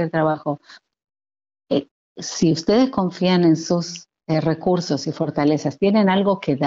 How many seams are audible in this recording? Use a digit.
0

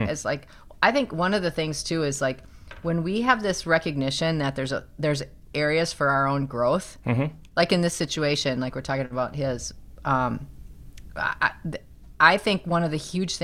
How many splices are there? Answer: 0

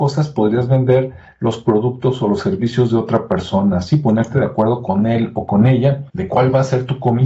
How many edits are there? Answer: 1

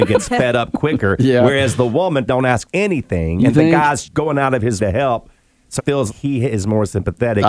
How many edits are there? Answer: 6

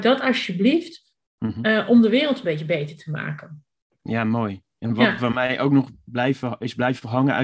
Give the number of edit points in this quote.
0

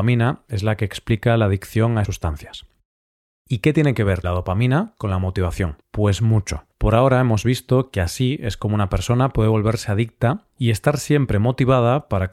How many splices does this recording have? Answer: 4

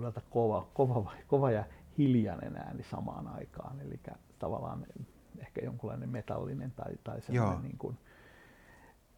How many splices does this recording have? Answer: 0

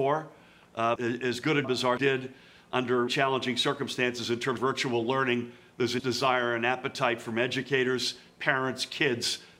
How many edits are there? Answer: 6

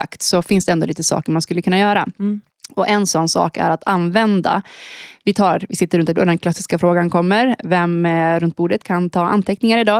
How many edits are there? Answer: 1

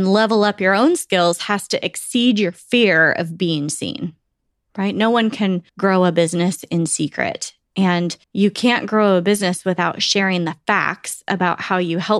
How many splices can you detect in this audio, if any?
2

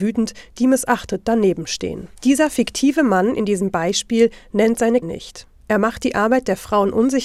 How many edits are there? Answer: 2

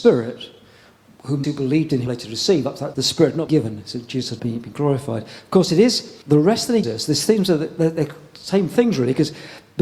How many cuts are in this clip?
7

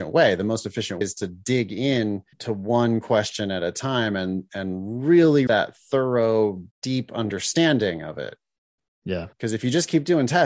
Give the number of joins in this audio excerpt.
5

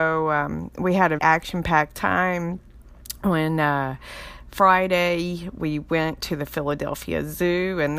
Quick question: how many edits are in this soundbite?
1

